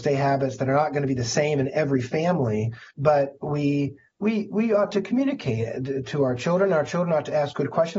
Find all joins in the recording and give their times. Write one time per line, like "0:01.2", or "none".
0:02.9